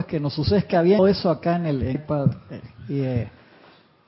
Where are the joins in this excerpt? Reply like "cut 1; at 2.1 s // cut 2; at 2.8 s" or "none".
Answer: cut 1; at 1.0 s // cut 2; at 1.9 s